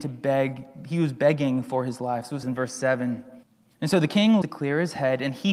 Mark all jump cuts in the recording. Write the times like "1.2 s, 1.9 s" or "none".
2.4 s, 3.4 s, 4.4 s